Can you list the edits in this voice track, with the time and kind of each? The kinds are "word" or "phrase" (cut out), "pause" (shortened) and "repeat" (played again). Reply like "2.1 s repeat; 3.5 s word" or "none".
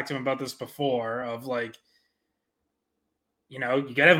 none